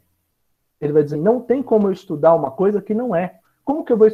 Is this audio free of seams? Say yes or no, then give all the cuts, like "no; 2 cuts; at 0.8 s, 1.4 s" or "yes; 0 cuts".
no; 1 cut; at 1.1 s